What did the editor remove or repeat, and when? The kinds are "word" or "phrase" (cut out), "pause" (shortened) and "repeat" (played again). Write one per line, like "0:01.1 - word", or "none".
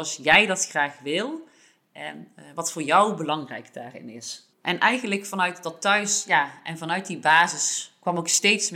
0:04.5 - pause